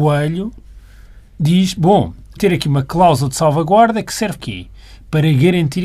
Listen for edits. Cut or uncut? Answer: cut